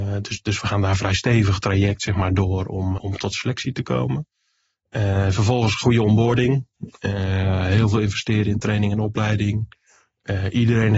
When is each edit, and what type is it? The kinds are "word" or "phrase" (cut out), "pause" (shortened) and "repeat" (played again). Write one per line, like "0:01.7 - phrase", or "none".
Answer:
0:03.0 - word